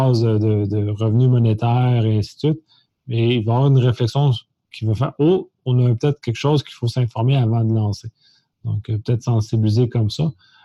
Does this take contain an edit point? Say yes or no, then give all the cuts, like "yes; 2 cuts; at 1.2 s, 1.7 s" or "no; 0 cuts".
no; 0 cuts